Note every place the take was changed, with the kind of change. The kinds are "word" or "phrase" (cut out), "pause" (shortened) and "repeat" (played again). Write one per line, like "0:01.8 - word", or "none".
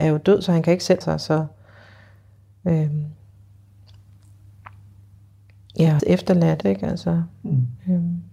0:01.0 - word
0:06.0 - word
0:06.6 - word